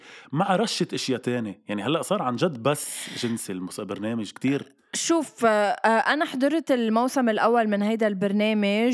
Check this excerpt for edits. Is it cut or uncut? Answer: uncut